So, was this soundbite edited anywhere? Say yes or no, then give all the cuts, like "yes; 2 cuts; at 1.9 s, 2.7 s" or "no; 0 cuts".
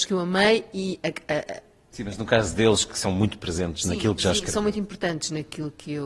no; 0 cuts